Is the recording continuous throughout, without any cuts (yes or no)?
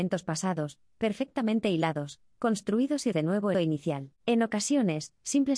no